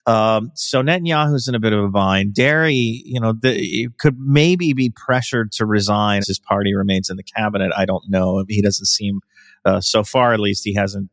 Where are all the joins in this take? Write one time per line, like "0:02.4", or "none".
0:06.2